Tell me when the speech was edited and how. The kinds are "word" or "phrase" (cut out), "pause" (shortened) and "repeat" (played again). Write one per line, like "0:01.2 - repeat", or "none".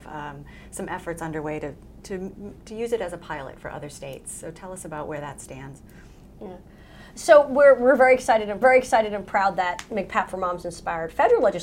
0:08.6 - repeat